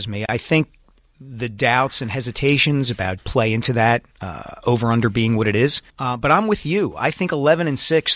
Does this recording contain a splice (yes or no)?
yes